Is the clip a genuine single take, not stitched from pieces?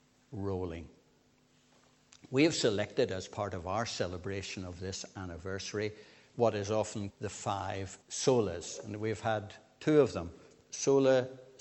no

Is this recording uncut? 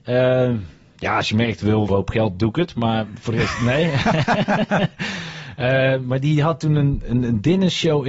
no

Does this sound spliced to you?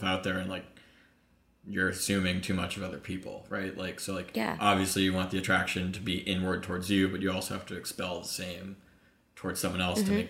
no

